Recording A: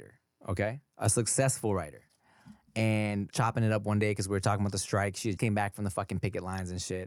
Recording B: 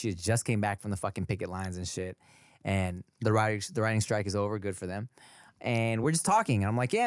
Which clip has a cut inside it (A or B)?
A